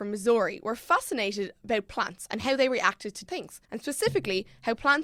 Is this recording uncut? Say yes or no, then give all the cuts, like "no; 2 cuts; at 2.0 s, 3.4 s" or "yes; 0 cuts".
no; 2 cuts; at 3.3 s, 3.6 s